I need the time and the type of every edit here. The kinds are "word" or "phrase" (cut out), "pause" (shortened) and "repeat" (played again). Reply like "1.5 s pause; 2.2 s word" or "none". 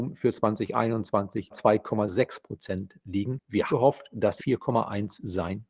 1.5 s phrase; 3.7 s word; 4.4 s word